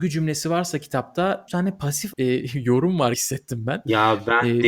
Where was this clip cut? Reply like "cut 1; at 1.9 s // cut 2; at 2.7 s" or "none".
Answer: cut 1; at 1.5 s // cut 2; at 2.1 s // cut 3; at 3.1 s